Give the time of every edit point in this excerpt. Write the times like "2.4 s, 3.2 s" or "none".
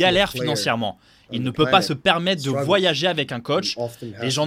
none